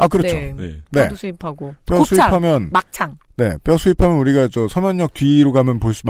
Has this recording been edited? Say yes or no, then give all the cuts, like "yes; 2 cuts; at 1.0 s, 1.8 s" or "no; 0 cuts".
no; 0 cuts